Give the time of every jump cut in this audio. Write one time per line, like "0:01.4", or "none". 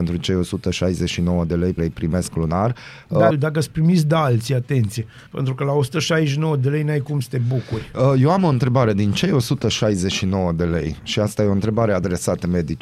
0:01.8
0:03.3
0:05.3